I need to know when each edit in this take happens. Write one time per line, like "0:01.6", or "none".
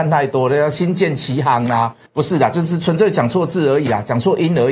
0:02.1